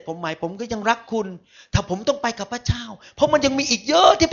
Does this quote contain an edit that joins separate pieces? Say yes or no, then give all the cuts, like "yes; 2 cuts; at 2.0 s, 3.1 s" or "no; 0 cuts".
no; 0 cuts